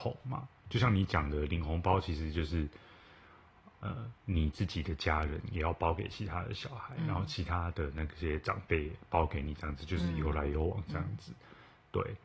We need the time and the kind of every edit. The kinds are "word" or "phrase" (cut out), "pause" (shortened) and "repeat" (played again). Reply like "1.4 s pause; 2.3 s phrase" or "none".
4.2 s pause